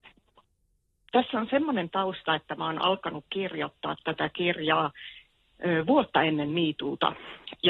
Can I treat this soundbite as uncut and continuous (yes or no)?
yes